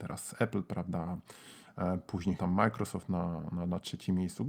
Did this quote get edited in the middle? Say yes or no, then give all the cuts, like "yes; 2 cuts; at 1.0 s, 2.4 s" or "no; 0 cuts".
yes; 1 cut; at 2.4 s